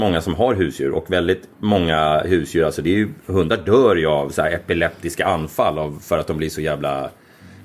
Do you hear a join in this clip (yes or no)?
no